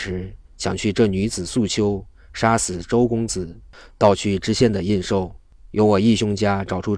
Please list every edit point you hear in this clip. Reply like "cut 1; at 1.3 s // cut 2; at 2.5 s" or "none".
none